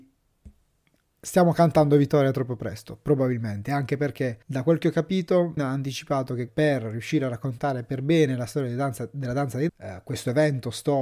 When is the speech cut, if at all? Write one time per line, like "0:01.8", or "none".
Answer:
0:04.4
0:05.6
0:06.5
0:09.7